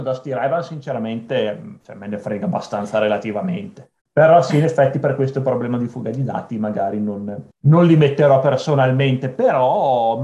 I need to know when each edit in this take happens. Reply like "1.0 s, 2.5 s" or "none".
4.0 s, 7.5 s